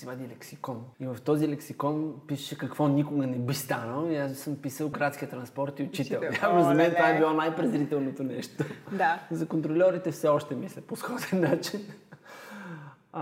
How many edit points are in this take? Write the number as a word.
two